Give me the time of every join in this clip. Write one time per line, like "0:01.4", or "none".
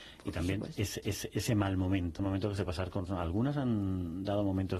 0:01.0
0:02.2
0:02.7
0:03.1